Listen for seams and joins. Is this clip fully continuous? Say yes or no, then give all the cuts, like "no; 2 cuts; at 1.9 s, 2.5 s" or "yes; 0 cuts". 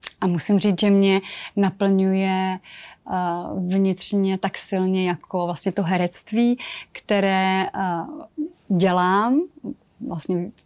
yes; 0 cuts